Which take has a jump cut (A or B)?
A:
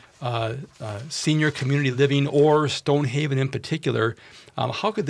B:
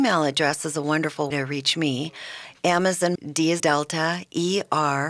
B